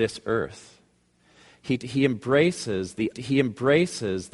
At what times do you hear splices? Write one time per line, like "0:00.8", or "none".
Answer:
0:03.1